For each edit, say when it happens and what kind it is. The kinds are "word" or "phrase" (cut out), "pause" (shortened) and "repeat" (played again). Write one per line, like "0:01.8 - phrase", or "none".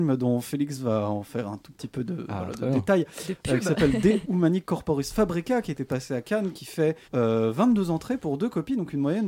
0:07.0 - pause